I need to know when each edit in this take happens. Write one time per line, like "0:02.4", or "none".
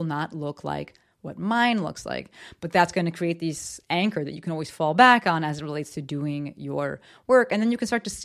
none